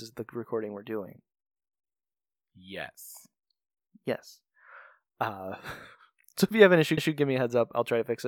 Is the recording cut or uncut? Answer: cut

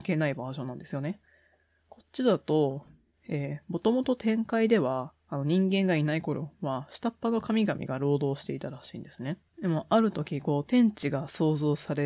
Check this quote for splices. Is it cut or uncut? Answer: cut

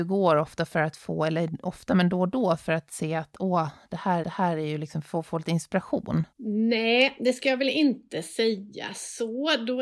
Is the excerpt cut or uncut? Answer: cut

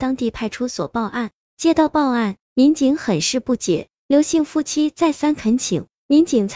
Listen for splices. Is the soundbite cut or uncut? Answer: cut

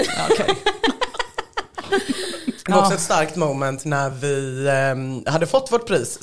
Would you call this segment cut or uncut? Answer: uncut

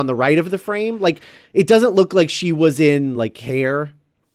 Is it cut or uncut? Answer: uncut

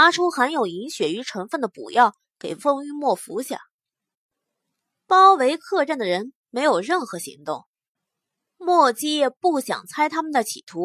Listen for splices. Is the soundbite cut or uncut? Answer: uncut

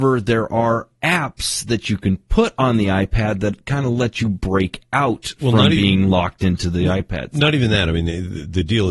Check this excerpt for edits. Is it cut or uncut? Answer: uncut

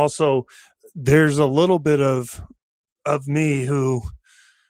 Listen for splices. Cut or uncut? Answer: uncut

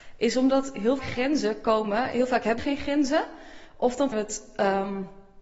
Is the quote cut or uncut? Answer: cut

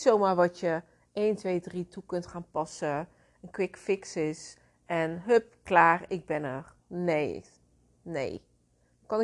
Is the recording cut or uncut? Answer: uncut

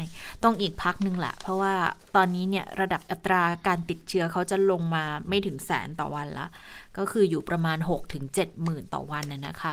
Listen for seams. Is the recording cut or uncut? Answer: cut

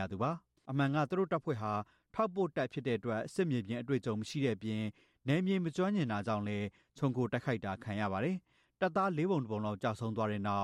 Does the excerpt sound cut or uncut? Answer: uncut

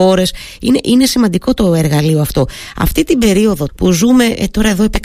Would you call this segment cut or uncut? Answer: cut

